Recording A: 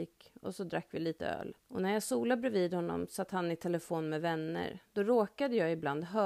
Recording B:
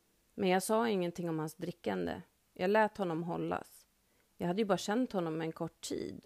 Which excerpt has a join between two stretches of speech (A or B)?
A